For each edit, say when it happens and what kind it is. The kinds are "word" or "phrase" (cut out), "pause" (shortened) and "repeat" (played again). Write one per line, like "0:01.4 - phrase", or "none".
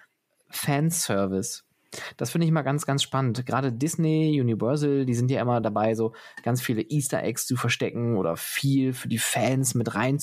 none